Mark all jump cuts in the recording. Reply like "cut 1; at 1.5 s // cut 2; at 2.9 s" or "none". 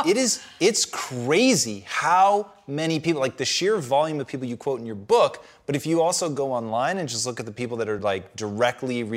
none